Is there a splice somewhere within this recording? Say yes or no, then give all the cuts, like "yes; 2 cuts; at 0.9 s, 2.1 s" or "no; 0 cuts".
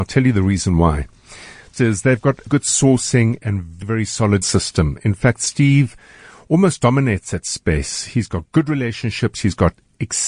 yes; 4 cuts; at 1.7 s, 2.5 s, 3.8 s, 4.4 s